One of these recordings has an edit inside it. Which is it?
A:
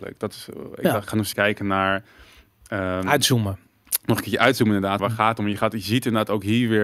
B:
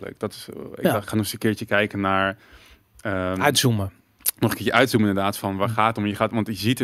A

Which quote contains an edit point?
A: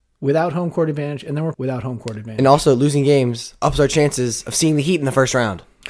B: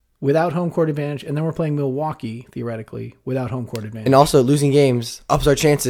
A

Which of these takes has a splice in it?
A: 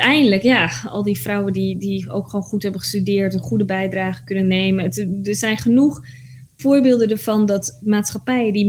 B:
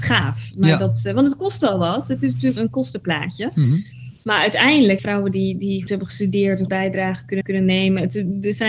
B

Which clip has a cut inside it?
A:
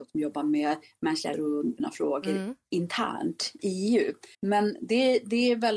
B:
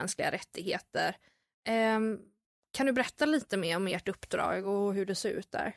A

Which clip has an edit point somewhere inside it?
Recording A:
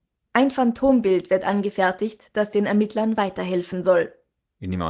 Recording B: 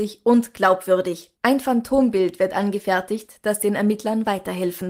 B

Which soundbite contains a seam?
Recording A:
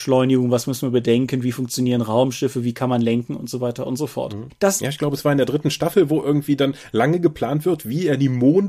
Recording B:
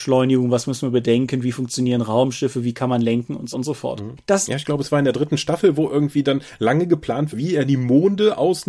B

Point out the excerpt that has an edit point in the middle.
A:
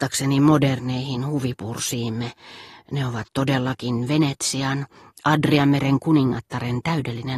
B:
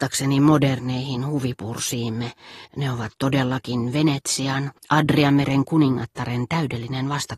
B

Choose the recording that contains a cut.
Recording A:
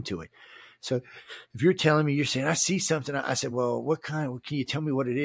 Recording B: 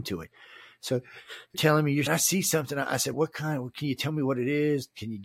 B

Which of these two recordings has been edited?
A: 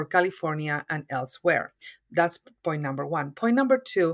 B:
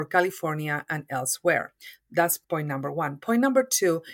B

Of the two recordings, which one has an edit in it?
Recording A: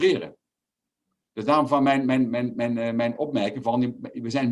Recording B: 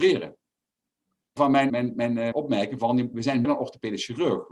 B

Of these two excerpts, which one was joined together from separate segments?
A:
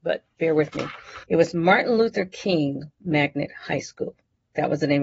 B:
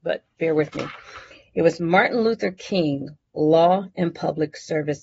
A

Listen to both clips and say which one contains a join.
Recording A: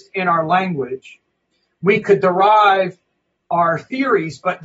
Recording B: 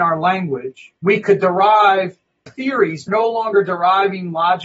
B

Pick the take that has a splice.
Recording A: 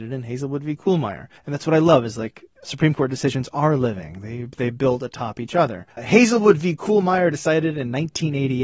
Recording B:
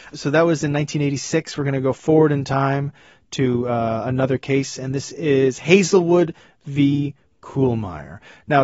A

